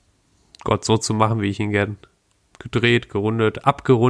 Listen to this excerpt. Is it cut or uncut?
uncut